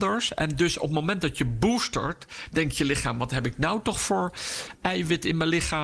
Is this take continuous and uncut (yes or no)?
yes